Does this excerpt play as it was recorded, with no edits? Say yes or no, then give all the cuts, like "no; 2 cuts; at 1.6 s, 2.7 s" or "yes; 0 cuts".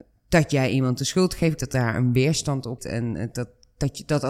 no; 2 cuts; at 1.6 s, 2.8 s